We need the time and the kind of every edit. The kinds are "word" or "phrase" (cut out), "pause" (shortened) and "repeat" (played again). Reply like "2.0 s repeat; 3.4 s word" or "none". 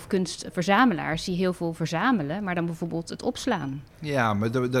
3.9 s pause

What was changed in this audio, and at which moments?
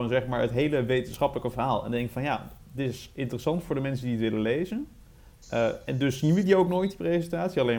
none

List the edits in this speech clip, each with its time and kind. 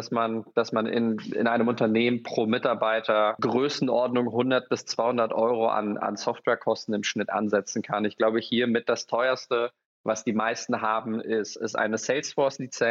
none

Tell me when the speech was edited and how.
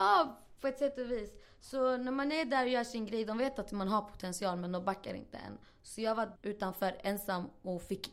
6.4 s word

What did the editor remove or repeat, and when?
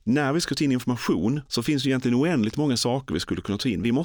1.5 s pause

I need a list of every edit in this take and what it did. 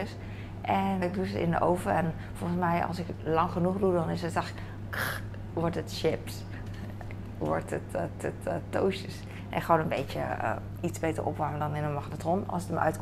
1.0 s word; 8.2 s repeat

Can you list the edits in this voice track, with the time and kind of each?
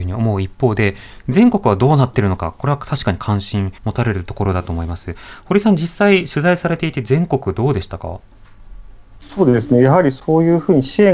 3.8 s pause

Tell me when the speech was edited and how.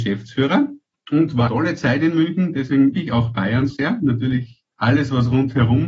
0.9 s pause; 1.5 s word; 2.9 s word; 3.7 s word; 4.7 s pause

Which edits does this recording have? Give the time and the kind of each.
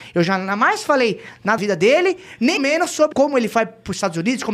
1.6 s word; 2.6 s word; 3.1 s word

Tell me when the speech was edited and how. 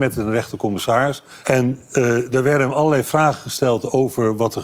none

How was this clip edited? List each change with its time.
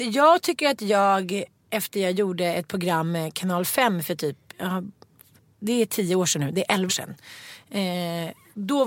6.9 s word

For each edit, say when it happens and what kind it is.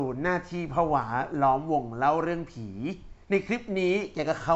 3.2 s pause

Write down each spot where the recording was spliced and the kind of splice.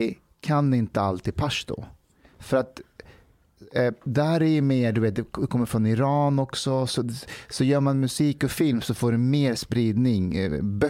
none

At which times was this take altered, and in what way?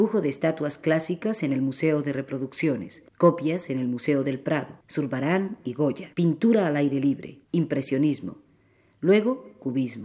3.1 s pause; 4.8 s pause; 6.1 s pause; 7.4 s pause

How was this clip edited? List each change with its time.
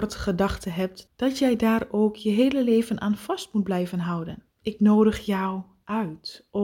4.5 s pause

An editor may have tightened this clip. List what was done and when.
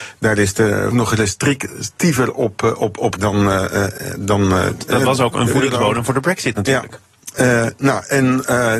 0.9 s phrase; 3.2 s phrase

